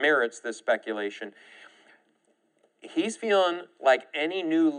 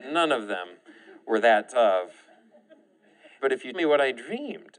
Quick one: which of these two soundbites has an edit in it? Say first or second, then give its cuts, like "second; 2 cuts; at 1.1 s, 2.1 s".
second; 2 cuts; at 3.4 s, 3.7 s